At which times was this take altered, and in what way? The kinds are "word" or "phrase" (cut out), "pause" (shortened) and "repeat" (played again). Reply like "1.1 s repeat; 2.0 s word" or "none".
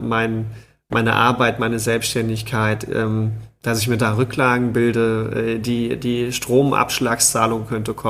none